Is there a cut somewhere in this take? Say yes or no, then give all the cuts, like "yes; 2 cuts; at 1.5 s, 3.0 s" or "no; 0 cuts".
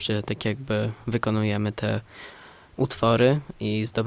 no; 0 cuts